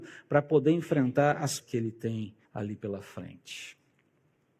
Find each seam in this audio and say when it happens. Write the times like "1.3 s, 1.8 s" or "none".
1.6 s, 2.4 s